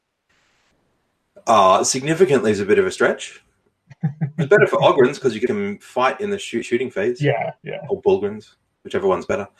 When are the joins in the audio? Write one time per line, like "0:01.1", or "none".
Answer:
0:05.5
0:06.6
0:07.6